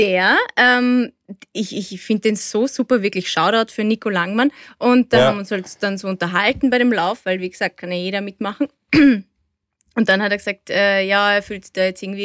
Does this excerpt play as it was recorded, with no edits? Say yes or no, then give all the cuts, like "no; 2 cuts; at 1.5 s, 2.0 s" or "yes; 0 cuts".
yes; 0 cuts